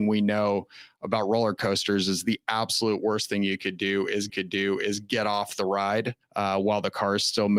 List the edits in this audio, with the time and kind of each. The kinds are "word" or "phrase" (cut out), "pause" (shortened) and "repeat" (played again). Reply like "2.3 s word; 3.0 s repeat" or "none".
4.3 s repeat; 6.2 s pause